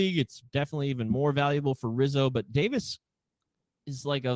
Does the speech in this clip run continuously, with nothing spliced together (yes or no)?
yes